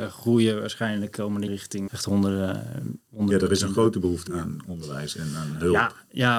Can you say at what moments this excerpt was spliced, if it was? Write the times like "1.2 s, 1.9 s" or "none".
1.5 s, 1.9 s, 4.3 s